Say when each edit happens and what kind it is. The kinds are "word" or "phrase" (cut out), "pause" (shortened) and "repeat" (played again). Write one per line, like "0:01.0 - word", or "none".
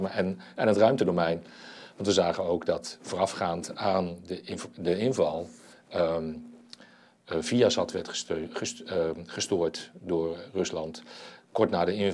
none